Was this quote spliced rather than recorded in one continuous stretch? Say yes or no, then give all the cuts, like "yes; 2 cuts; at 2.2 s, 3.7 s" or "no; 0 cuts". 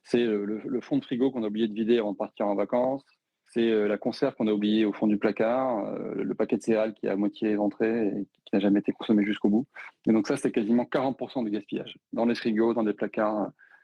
no; 0 cuts